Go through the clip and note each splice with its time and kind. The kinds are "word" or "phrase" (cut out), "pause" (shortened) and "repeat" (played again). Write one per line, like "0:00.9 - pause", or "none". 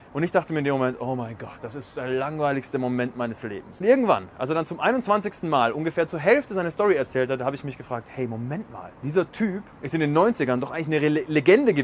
0:08.9 - pause
0:09.7 - pause